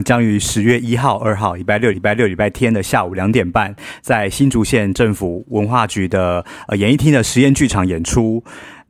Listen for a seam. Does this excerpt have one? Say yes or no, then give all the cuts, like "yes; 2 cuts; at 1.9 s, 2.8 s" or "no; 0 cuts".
yes; 1 cut; at 1.9 s